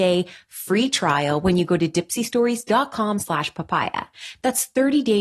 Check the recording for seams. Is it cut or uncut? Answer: uncut